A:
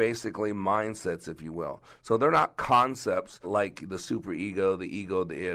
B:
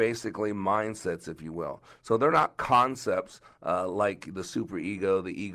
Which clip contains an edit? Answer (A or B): A